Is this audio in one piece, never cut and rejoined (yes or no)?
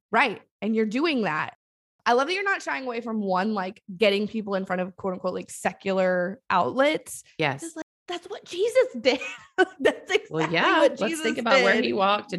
yes